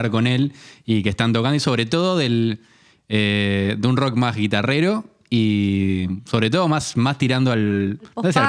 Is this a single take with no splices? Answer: yes; 0 cuts

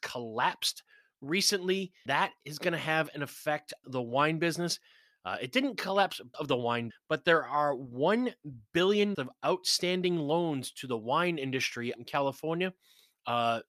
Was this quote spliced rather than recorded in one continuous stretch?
yes; 6 cuts; at 2.1 s, 3.8 s, 6.3 s, 6.9 s, 9.1 s, 12.0 s

